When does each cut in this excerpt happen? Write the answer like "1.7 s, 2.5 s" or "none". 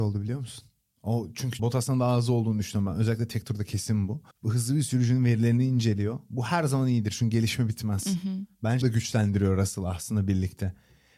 1.6 s, 4.3 s, 8.8 s